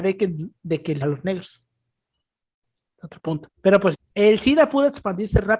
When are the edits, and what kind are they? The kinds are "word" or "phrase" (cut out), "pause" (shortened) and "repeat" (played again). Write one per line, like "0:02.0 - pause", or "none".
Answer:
0:01.0 - word
0:03.5 - pause
0:03.9 - word